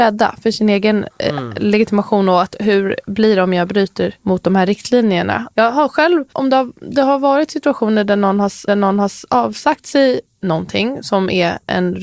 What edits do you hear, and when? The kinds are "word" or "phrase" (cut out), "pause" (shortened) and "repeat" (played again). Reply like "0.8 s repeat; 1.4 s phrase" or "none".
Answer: 1.1 s word; 4.2 s pause; 6.3 s word; 8.7 s repeat; 10.3 s word